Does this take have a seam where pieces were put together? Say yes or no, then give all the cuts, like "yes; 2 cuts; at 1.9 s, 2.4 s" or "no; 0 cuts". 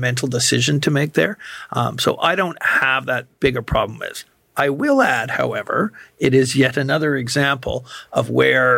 no; 0 cuts